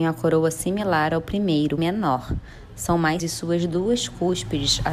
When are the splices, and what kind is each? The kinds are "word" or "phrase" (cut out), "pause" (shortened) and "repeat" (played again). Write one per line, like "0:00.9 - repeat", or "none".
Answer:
0:01.8 - word
0:03.2 - word